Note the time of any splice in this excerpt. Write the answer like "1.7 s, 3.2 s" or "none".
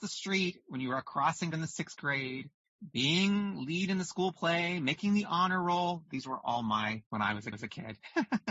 1.5 s, 7.1 s, 7.5 s